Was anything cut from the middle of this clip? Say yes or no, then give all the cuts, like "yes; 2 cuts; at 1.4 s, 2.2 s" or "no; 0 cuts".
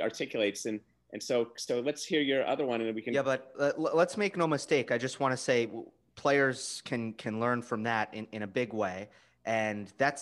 no; 0 cuts